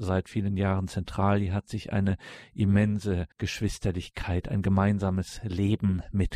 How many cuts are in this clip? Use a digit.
1